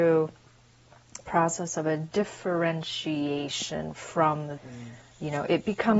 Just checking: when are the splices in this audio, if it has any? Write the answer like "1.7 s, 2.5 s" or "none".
1.2 s, 4.6 s